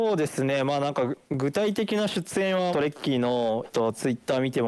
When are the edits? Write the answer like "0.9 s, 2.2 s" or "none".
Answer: 2.7 s, 3.6 s